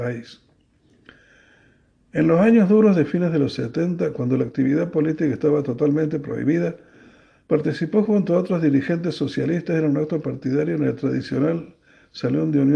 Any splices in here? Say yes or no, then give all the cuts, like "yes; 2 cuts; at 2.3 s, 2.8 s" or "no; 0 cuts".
no; 0 cuts